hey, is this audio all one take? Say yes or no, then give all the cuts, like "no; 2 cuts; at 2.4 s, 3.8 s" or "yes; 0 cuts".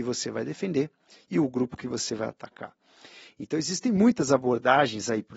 yes; 0 cuts